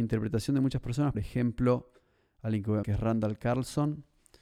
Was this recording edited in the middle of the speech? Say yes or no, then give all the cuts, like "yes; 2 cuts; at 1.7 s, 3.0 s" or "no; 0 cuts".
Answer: yes; 2 cuts; at 1.1 s, 2.8 s